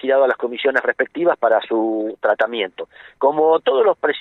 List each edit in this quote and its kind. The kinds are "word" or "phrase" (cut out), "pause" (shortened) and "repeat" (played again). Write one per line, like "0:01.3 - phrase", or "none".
none